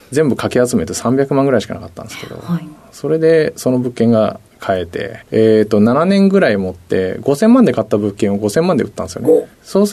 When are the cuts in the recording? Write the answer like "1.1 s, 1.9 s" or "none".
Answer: 5.2 s